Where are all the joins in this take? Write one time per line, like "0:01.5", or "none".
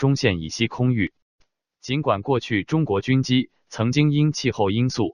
none